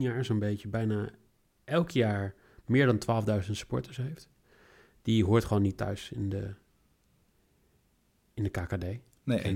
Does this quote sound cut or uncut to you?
uncut